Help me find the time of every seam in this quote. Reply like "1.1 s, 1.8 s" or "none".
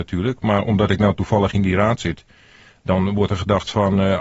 none